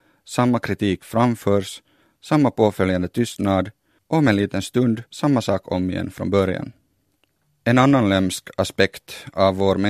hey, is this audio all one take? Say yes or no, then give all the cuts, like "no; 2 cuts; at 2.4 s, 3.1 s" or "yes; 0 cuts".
no; 2 cuts; at 5.1 s, 7.4 s